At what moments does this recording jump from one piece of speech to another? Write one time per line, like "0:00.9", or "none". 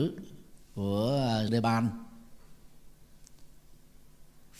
0:01.5